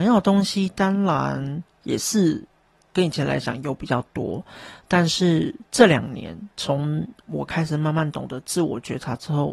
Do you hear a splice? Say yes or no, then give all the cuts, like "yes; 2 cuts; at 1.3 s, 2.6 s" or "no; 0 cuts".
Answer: no; 0 cuts